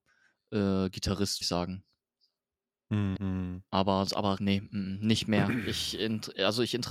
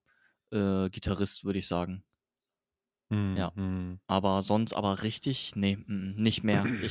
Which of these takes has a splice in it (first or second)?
first